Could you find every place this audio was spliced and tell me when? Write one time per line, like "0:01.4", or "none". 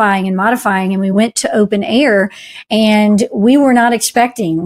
none

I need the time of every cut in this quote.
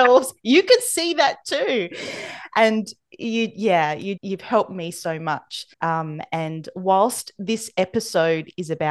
0:04.2
0:05.7

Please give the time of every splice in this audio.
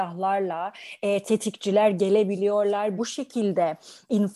0:03.0

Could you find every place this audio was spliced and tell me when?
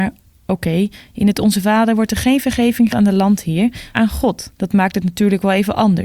0:02.9
0:03.9
0:04.5

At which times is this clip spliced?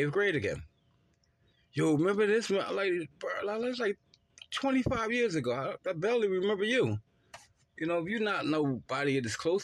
none

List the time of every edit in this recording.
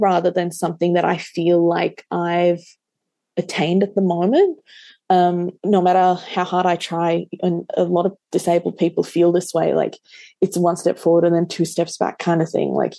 0:05.6

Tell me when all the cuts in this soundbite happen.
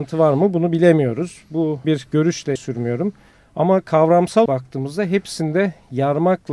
0:01.8
0:02.6
0:04.5

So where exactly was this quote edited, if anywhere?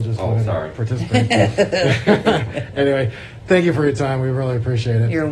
none

